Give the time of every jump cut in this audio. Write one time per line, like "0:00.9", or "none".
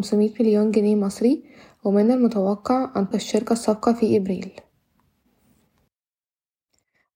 0:03.1